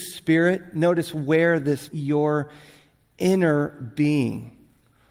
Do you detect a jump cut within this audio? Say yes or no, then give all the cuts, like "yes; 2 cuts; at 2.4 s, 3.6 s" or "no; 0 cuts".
yes; 1 cut; at 1.9 s